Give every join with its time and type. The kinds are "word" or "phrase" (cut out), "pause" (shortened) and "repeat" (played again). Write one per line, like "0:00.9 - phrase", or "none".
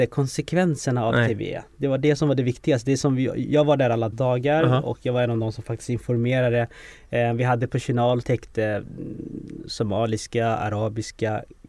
0:04.1 - word
0:08.2 - word